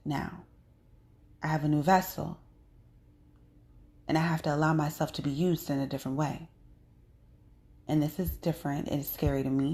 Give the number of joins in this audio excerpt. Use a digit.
1